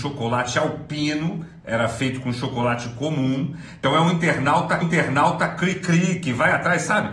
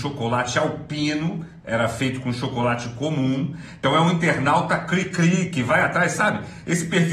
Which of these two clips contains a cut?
first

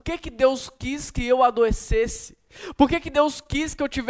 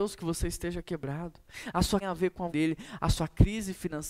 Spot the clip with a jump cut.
second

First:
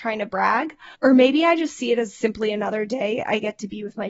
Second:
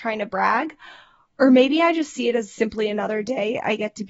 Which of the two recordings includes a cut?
first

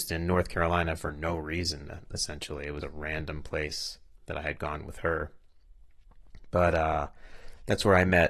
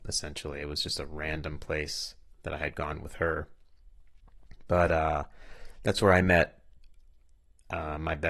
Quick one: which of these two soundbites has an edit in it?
first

